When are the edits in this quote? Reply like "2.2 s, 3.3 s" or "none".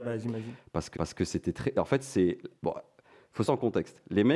0.9 s, 2.6 s, 3.5 s